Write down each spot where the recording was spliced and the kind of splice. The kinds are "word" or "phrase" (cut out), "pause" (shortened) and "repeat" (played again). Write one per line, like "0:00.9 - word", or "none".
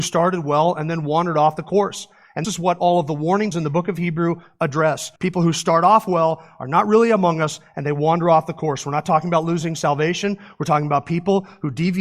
0:02.4 - word
0:03.5 - word
0:05.2 - pause